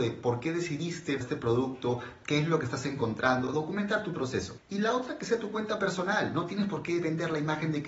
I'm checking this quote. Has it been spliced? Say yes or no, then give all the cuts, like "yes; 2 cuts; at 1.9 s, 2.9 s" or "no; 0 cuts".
yes; 1 cut; at 1.2 s